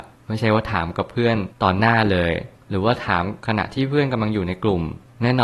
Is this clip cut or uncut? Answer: cut